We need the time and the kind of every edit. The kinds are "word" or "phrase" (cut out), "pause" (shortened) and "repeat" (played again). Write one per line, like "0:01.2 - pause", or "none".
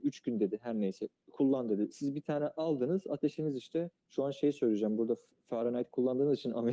0:04.0 - pause